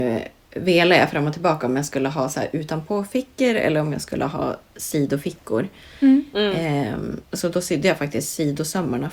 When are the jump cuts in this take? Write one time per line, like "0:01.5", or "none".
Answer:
0:07.3